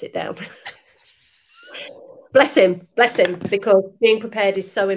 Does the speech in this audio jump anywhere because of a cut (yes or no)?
no